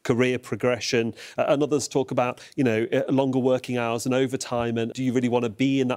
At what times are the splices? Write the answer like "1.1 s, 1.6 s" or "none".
4.9 s